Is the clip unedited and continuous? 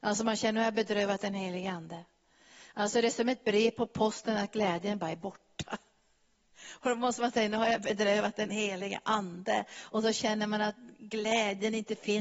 yes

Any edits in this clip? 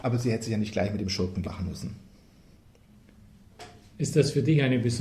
yes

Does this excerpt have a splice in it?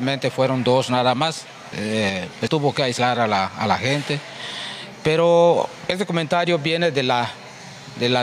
yes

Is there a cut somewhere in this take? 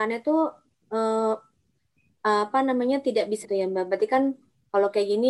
yes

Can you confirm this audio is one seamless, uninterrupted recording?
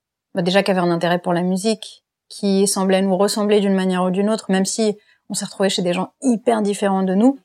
yes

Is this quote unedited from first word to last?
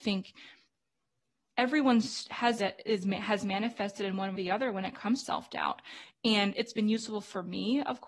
no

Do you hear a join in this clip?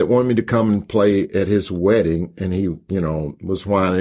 no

